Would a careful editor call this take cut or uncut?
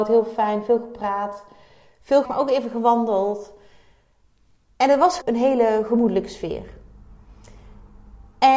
cut